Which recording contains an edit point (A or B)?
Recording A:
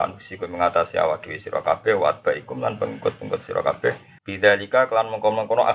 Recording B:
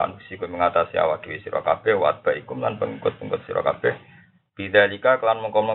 A